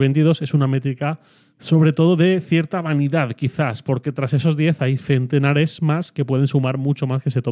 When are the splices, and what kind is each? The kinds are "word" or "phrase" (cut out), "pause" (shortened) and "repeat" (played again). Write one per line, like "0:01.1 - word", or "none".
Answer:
none